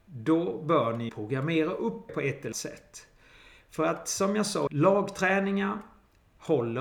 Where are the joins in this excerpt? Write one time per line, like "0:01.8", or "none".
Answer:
0:01.1
0:02.1
0:02.5
0:04.7